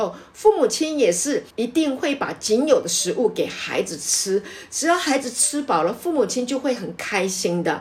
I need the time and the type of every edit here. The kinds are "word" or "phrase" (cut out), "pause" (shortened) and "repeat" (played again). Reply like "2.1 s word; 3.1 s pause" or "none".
1.5 s pause